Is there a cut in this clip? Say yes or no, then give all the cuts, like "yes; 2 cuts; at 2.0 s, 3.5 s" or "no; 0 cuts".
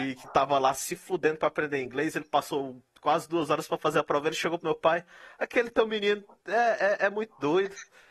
no; 0 cuts